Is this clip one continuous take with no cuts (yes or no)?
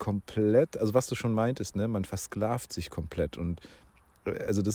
yes